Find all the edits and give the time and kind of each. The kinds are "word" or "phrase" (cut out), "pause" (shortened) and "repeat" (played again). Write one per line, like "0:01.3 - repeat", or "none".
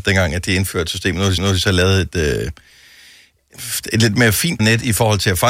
0:01.4 - repeat
0:04.6 - word